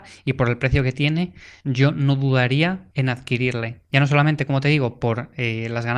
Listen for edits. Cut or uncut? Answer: uncut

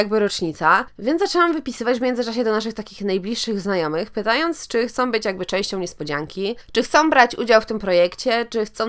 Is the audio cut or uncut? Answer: uncut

